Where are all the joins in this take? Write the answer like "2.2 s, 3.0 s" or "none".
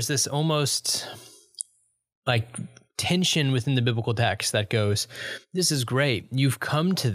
none